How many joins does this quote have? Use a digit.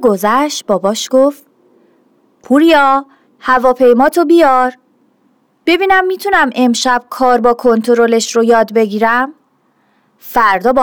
0